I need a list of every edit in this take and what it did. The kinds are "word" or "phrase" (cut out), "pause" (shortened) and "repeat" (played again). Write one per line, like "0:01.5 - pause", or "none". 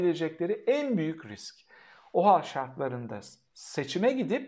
none